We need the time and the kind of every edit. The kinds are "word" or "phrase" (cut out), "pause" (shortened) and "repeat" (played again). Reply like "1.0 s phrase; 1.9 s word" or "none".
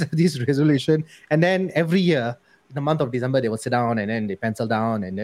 none